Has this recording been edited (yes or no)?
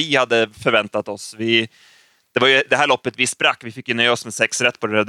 no